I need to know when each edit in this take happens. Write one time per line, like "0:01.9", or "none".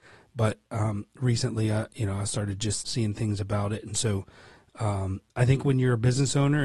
0:02.8